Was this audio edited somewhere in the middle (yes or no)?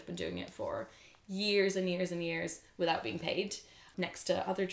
no